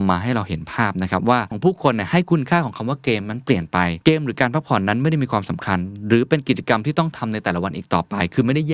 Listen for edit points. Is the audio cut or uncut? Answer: cut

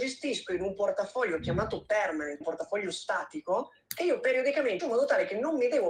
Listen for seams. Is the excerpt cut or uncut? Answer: cut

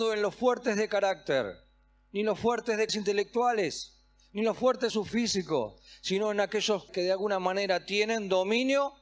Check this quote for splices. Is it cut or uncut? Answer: cut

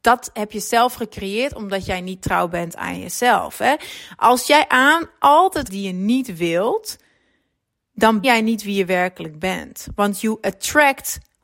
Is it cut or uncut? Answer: cut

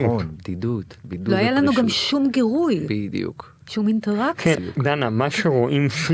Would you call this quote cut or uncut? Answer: cut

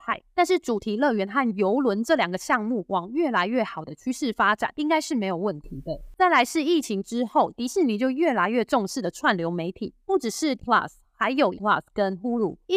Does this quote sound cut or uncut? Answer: cut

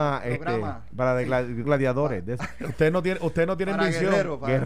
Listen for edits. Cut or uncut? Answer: cut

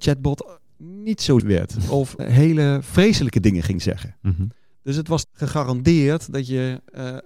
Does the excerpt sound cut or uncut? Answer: cut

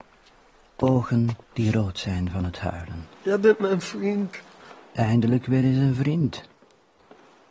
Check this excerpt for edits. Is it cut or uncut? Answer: cut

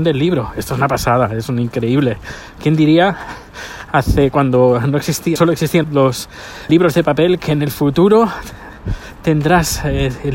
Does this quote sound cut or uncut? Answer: cut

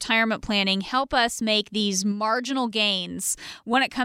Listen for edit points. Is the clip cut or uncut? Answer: uncut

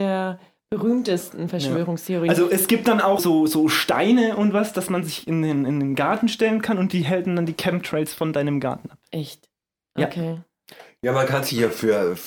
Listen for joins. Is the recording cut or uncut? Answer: cut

